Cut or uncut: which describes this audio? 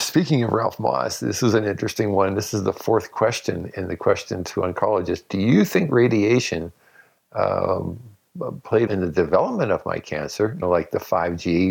cut